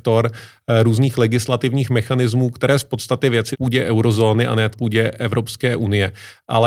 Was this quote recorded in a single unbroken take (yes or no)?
no